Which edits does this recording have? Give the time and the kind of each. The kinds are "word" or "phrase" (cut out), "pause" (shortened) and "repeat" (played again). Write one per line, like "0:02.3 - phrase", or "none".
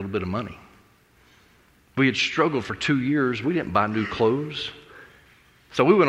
none

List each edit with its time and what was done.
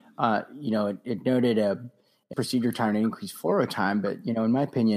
0:02.3 - word

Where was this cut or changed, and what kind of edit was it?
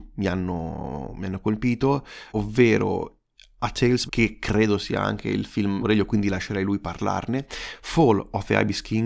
0:02.3 - word
0:04.1 - phrase
0:05.8 - phrase

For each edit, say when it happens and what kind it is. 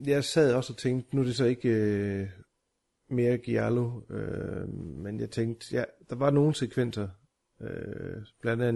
none

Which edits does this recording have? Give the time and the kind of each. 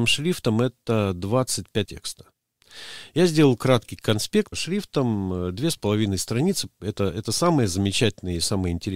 0:01.9 - word
0:04.5 - word

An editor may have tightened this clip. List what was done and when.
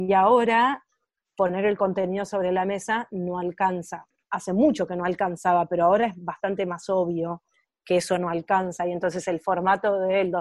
none

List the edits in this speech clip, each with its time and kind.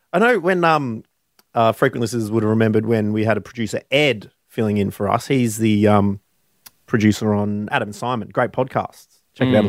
none

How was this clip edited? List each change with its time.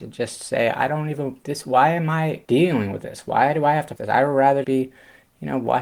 0:02.4 - pause
0:04.0 - word
0:04.6 - word

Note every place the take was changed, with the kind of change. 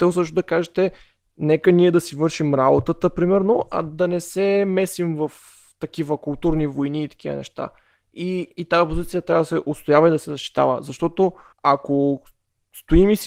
none

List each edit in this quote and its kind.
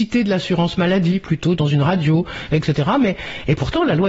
none

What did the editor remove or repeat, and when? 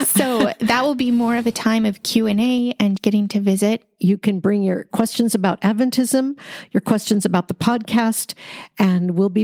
0:03.0 - word

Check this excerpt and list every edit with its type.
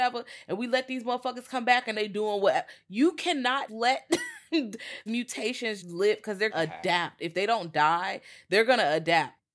0:01.9 - word
0:03.7 - word
0:05.1 - word
0:05.8 - word
0:06.5 - word

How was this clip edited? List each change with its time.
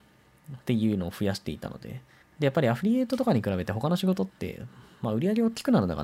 0:02.2 - pause

